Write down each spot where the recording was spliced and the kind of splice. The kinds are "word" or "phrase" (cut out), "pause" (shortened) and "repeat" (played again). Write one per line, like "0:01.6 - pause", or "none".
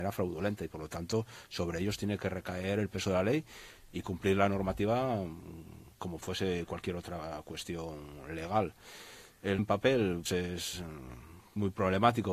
0:06.2 - word
0:09.6 - word
0:10.3 - word